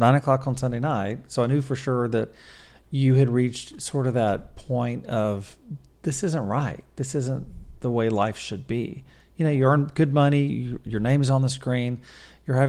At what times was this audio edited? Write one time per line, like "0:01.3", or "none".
none